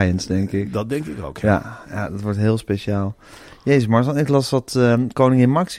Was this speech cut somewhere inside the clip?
no; 0 cuts

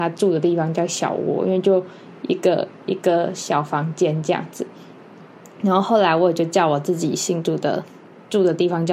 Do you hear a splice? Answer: no; 0 cuts

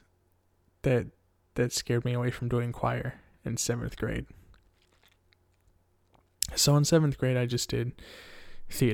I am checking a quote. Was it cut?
no; 0 cuts

